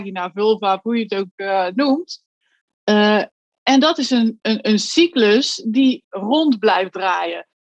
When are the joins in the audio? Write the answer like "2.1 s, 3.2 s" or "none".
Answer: 4.4 s